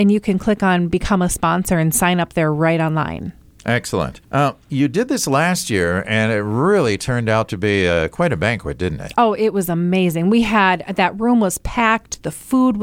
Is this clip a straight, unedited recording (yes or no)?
no